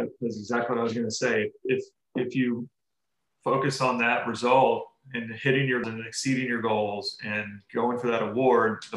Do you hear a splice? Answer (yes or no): yes